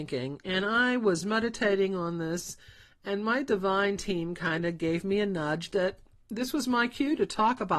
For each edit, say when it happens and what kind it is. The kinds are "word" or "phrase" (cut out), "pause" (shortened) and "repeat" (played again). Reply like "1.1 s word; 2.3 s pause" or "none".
none